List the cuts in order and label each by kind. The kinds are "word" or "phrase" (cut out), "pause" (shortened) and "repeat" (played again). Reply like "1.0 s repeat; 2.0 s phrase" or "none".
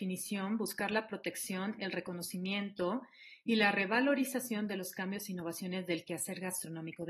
none